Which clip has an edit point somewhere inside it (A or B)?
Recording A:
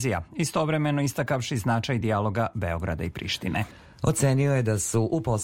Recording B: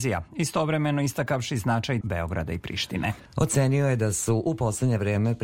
B